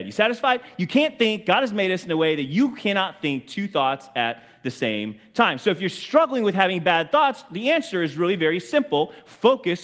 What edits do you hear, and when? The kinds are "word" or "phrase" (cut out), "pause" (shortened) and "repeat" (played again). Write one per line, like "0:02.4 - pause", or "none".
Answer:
none